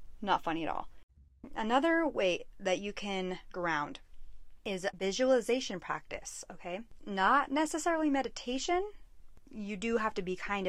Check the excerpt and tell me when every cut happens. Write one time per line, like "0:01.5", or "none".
none